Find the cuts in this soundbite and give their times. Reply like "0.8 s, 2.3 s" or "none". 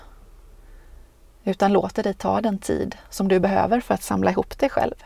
none